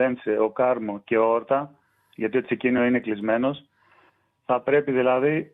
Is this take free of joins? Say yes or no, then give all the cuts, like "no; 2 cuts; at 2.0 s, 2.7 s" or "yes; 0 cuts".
yes; 0 cuts